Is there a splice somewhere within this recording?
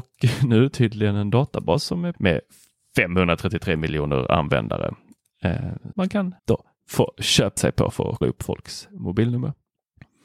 yes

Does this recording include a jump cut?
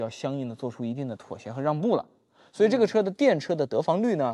no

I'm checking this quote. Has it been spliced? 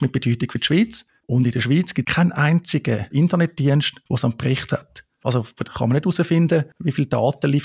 yes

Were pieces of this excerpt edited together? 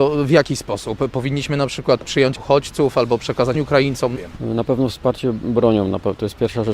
yes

